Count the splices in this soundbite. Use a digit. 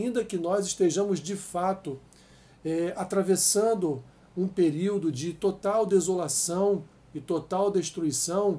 0